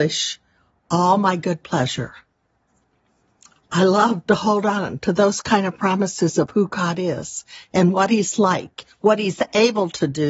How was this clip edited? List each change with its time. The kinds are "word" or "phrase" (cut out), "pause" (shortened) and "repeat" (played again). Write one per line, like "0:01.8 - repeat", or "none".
none